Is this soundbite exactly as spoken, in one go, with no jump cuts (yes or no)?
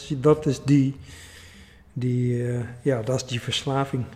yes